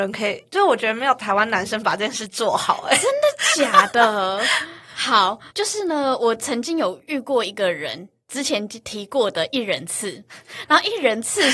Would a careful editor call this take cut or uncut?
cut